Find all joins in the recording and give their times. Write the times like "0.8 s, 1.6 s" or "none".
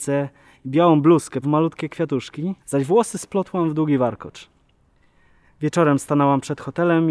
1.4 s, 2.6 s

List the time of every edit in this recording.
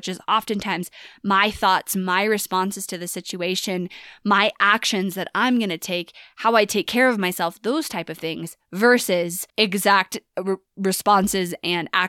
9.5 s

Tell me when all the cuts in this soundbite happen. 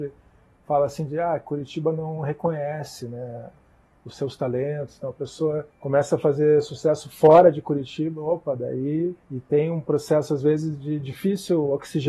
5.7 s, 9.2 s

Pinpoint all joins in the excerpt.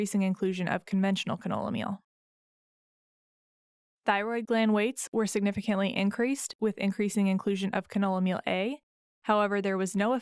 none

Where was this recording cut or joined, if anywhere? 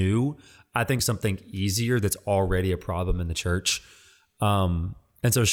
1.0 s

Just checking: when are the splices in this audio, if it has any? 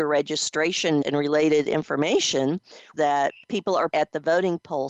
1.0 s, 2.9 s, 3.4 s, 3.9 s

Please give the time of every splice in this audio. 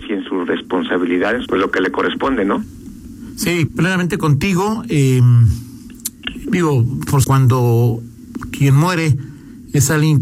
1.4 s, 3.7 s, 6.4 s, 7.2 s

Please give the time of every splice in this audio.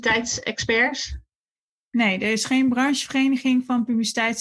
none

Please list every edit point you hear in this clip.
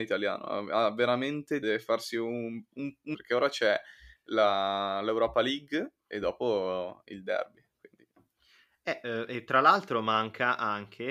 1.6 s, 3.1 s

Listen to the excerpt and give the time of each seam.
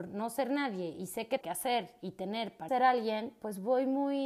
1.4 s, 2.7 s

